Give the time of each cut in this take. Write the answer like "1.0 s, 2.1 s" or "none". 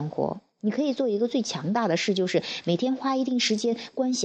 none